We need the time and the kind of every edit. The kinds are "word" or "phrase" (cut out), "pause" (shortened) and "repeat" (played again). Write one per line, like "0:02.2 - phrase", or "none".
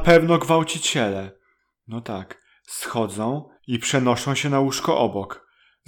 0:03.6 - pause